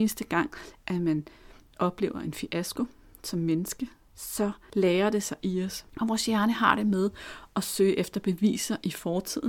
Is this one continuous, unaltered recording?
yes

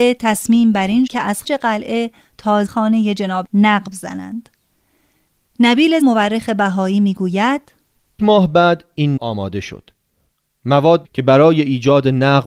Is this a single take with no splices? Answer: no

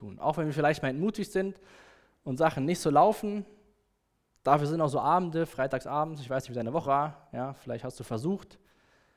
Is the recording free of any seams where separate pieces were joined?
no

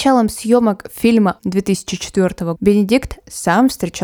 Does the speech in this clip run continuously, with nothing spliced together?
no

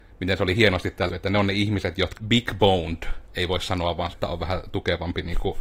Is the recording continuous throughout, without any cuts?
no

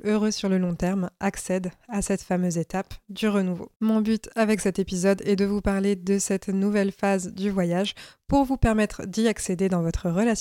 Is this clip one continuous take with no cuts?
no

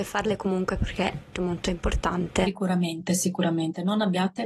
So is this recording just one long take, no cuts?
no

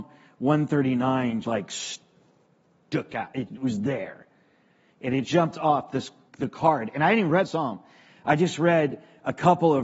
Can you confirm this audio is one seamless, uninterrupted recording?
no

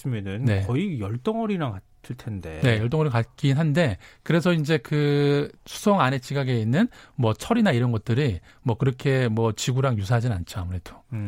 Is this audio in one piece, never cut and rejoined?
yes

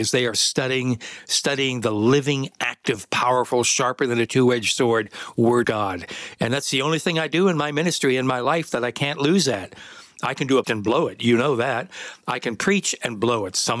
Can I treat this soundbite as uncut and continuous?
no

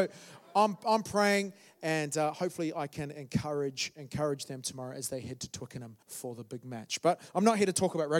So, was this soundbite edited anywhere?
yes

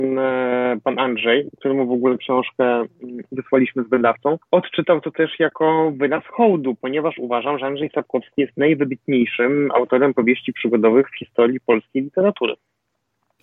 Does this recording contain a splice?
no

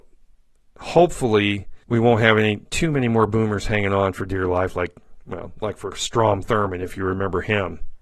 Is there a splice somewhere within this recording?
yes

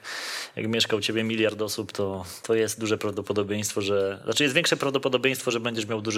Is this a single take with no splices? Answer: yes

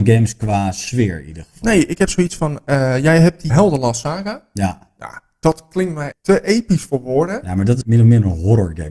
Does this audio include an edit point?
yes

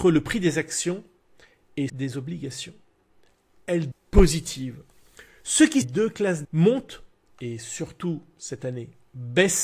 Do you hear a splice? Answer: yes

